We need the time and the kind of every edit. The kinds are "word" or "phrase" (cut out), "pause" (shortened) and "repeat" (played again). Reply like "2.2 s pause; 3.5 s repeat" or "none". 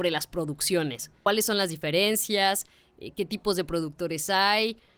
none